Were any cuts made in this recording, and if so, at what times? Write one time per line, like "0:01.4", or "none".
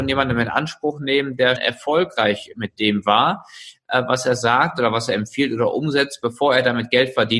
0:01.6